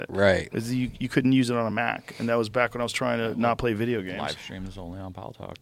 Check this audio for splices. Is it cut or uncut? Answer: uncut